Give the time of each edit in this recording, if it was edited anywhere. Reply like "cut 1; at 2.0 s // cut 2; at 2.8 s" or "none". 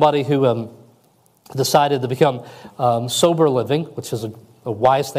none